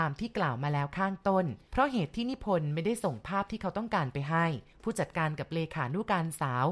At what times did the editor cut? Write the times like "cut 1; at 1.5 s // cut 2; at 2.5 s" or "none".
cut 1; at 1.7 s // cut 2; at 4.7 s